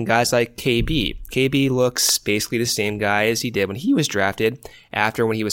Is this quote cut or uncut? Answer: uncut